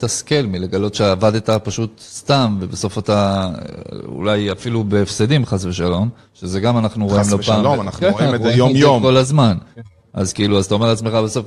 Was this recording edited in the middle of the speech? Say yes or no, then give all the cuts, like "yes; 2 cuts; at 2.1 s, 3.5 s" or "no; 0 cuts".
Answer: no; 0 cuts